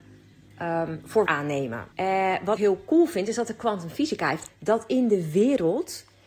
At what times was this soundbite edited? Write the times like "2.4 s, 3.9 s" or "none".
1.3 s, 1.9 s, 2.6 s, 4.5 s